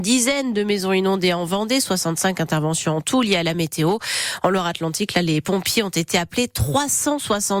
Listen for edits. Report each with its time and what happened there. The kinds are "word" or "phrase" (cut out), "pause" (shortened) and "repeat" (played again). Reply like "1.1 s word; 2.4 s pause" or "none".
none